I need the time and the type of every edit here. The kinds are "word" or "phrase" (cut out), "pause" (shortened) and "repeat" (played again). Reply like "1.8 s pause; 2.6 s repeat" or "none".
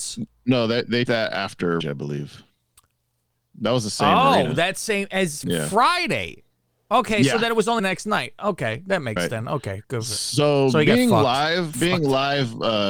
1.1 s word; 1.8 s word; 5.4 s word; 7.8 s word; 9.2 s word; 11.7 s word